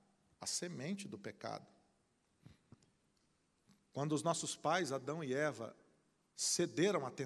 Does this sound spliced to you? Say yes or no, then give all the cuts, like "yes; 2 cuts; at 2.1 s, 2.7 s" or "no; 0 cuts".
no; 0 cuts